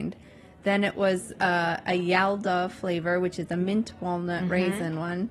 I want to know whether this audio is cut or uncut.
uncut